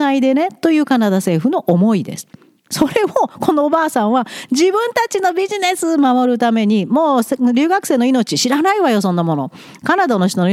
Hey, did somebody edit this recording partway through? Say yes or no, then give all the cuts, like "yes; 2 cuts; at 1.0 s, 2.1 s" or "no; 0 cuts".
no; 0 cuts